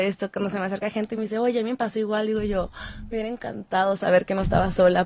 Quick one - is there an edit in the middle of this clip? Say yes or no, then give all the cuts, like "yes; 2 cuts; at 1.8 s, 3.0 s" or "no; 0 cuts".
no; 0 cuts